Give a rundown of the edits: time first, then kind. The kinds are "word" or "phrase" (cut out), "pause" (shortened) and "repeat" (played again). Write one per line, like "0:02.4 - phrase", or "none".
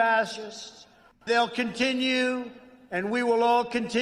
0:01.3 - word